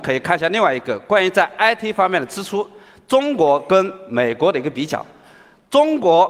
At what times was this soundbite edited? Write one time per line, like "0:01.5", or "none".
none